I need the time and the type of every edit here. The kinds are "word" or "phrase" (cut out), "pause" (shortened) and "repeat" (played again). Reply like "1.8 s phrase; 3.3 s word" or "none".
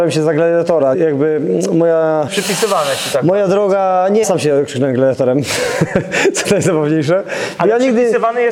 0.9 s word; 2.3 s word; 4.2 s word; 6.4 s word

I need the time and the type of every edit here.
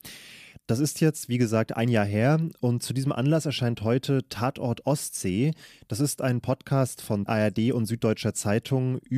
7.3 s word

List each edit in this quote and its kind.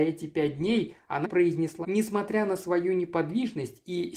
1.2 s word; 1.8 s phrase

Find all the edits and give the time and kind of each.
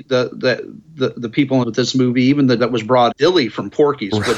1.6 s word; 2.6 s word; 3.1 s phrase

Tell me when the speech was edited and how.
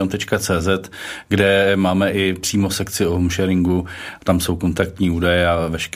none

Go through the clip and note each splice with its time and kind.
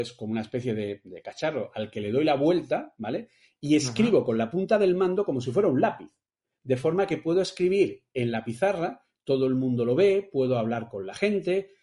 none

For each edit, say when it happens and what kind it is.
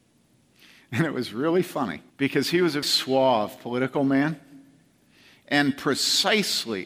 2.1 s pause; 2.8 s word

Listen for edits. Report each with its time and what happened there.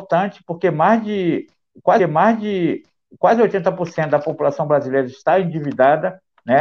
2.0 s repeat

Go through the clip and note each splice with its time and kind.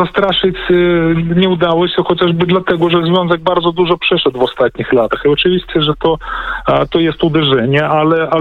none

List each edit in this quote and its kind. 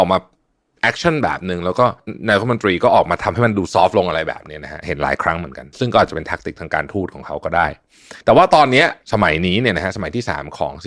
8.2 s pause

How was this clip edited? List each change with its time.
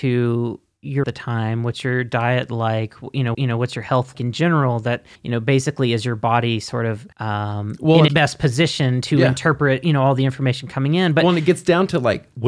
1.0 s phrase; 3.3 s repeat; 4.1 s word; 5.2 s pause; 7.1 s pause; 8.1 s word

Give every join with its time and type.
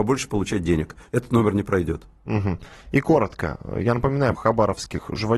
4.3 s word

